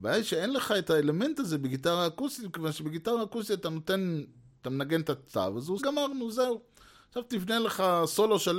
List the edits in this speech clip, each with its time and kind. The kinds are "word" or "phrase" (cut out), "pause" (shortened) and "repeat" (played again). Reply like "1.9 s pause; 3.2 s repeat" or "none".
5.8 s phrase